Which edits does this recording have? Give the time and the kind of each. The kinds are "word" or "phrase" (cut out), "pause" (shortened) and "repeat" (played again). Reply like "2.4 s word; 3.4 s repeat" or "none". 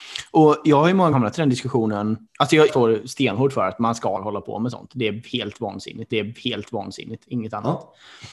1.1 s word; 2.3 s pause; 2.7 s word; 4.2 s phrase; 6.1 s repeat